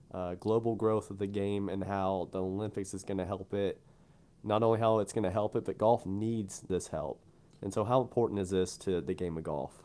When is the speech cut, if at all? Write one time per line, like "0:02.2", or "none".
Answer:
none